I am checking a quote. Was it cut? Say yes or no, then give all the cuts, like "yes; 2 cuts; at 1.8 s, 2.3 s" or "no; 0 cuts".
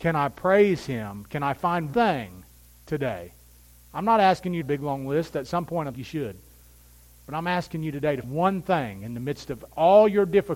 yes; 4 cuts; at 1.9 s, 4.6 s, 5.9 s, 8.2 s